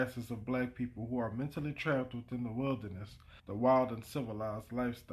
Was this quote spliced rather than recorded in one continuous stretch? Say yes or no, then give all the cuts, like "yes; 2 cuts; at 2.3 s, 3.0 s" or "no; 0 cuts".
yes; 1 cut; at 3.4 s